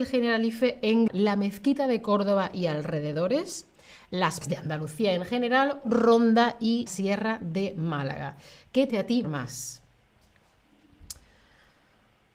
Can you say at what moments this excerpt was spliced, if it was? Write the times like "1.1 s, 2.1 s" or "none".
1.1 s, 4.4 s, 5.8 s, 6.9 s, 8.9 s, 9.2 s